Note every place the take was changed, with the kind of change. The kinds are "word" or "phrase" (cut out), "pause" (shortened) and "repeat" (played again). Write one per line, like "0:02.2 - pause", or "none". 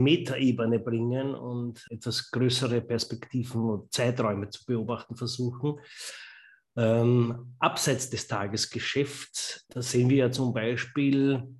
0:01.9 - word
0:09.7 - word